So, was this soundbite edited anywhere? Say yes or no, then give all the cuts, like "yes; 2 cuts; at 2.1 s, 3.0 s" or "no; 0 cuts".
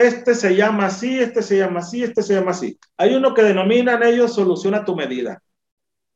yes; 1 cut; at 2.9 s